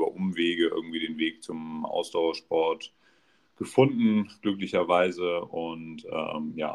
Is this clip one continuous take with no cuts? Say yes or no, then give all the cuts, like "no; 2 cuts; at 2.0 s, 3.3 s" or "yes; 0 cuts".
yes; 0 cuts